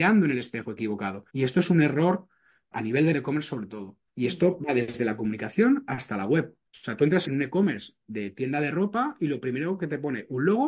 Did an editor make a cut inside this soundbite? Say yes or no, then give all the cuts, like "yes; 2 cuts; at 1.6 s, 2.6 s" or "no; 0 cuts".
yes; 6 cuts; at 1.3 s, 2.7 s, 3.1 s, 4.1 s, 6.7 s, 7.3 s